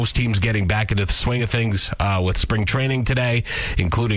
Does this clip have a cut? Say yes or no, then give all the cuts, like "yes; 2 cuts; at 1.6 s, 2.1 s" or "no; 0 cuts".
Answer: no; 0 cuts